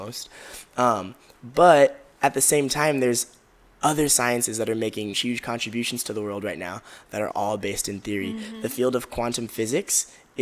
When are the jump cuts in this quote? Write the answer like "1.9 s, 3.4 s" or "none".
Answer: 5.1 s, 7.3 s